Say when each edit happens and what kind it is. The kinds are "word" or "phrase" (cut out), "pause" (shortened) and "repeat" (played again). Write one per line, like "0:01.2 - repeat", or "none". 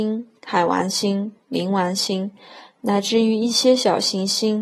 none